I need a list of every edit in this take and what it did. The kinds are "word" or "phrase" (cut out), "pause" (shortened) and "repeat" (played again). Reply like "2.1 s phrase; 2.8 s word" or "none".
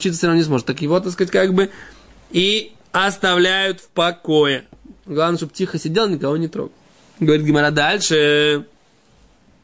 none